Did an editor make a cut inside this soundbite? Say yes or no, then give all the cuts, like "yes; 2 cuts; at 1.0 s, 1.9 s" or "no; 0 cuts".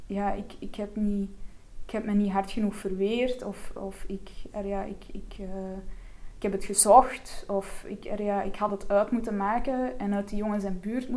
no; 0 cuts